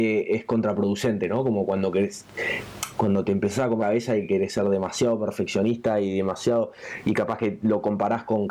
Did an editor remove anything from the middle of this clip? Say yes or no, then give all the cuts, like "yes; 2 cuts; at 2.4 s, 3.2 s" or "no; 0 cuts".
yes; 1 cut; at 3.8 s